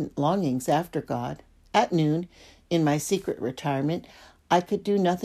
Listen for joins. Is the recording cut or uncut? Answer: uncut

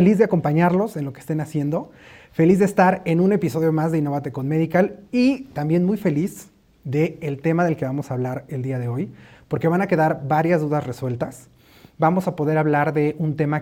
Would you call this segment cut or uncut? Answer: uncut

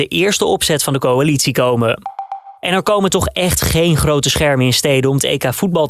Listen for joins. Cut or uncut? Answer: cut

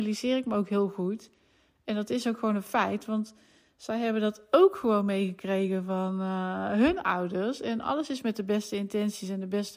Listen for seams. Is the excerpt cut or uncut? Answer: uncut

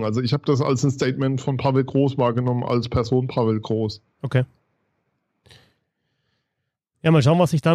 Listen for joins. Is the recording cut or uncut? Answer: uncut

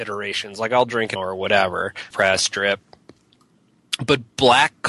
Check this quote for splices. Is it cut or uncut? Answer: cut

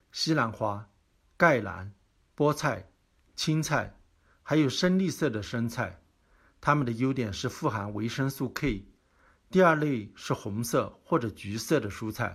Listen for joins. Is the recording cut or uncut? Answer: uncut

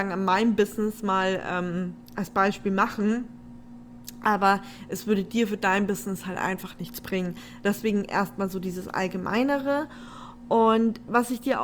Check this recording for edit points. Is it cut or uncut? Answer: uncut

